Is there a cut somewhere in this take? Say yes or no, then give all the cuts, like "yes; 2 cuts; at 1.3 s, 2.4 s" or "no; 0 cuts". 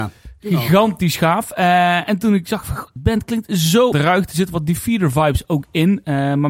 yes; 2 cuts; at 3.0 s, 3.9 s